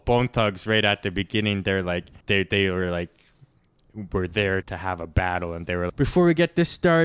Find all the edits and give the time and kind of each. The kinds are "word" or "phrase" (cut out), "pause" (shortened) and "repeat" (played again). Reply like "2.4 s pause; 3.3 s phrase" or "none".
2.2 s pause; 4.6 s word; 5.9 s word